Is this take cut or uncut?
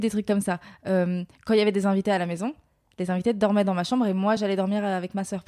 uncut